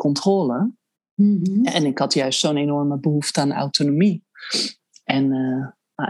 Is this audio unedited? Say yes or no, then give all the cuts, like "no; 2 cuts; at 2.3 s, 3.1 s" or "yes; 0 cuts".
yes; 0 cuts